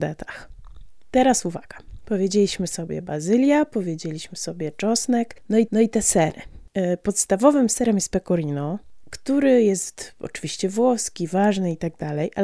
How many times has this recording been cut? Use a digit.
1